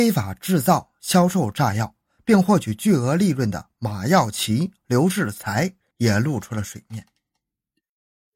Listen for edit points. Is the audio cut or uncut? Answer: uncut